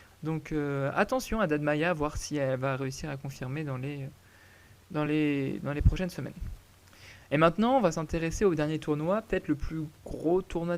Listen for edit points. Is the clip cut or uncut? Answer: uncut